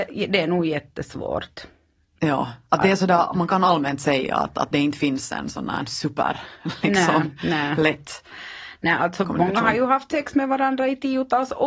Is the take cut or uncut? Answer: uncut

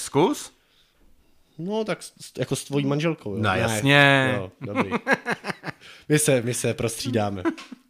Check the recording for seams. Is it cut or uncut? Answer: uncut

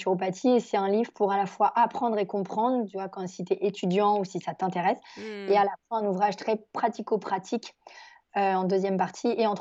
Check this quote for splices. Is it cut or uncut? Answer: uncut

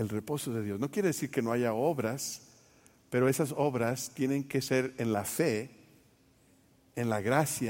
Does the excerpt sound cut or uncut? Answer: uncut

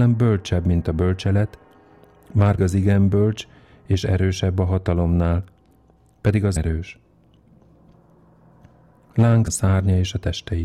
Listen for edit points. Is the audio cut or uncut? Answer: cut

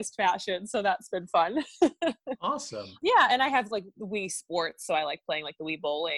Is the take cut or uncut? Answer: uncut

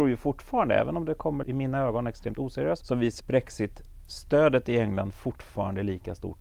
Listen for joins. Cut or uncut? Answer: cut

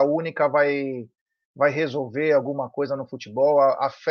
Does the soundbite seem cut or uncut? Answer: uncut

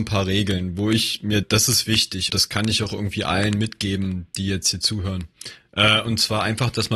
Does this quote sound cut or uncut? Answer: cut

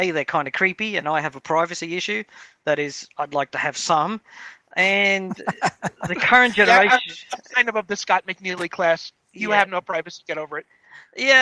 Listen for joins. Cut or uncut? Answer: cut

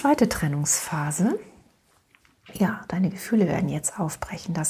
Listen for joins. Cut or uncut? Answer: uncut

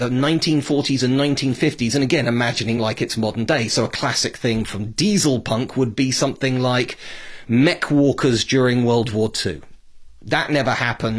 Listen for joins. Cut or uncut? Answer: uncut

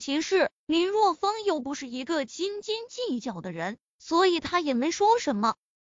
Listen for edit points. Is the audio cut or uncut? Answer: uncut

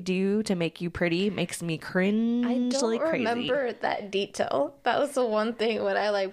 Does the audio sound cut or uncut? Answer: uncut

